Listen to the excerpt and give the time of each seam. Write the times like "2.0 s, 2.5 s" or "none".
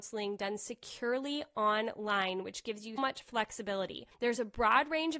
3.0 s, 4.1 s